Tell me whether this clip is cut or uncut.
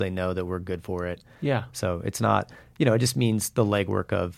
uncut